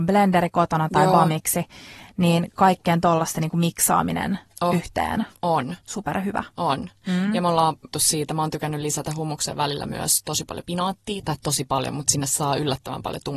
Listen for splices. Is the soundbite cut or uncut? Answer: cut